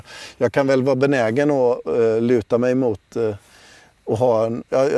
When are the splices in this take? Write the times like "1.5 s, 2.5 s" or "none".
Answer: none